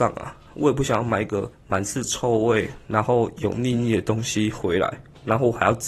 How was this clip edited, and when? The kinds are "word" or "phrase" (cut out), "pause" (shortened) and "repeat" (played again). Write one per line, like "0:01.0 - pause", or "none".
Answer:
0:01.5 - pause